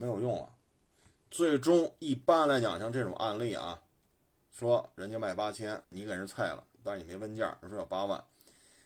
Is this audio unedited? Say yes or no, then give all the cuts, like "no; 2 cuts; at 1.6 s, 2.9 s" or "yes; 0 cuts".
no; 2 cuts; at 5.8 s, 6.7 s